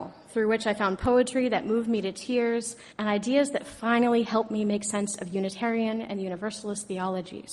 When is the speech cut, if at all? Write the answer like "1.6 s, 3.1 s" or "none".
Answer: 2.9 s